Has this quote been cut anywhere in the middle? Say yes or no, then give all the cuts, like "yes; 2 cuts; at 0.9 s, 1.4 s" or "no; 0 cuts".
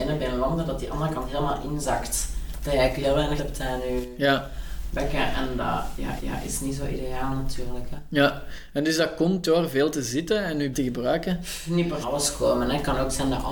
yes; 4 cuts; at 3.4 s, 6.2 s, 10.7 s, 12.0 s